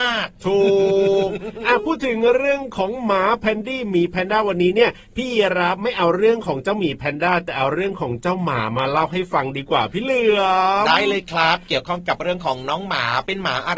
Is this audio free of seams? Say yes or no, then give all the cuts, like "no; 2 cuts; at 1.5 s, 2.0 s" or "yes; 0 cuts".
yes; 0 cuts